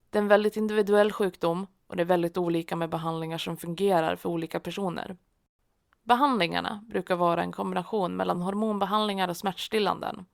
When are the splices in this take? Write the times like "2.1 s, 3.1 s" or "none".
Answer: none